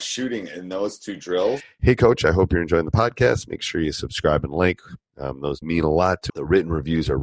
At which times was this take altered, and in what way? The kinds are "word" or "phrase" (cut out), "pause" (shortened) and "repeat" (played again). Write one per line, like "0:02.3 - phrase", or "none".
0:05.6 - word
0:06.3 - word